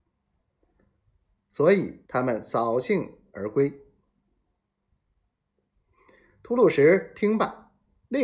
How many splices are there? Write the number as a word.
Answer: one